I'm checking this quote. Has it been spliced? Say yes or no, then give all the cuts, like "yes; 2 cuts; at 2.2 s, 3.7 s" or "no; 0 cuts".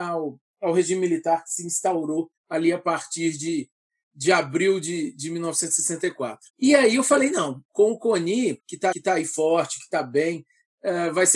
yes; 4 cuts; at 2.4 s, 6.5 s, 8.6 s, 8.9 s